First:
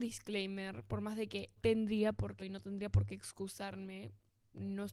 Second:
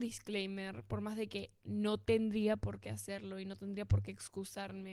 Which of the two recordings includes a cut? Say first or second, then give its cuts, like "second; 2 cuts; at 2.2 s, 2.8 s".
first; 2 cuts; at 1.6 s, 2.4 s